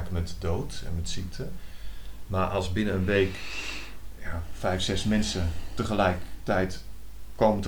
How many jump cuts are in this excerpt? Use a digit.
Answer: 0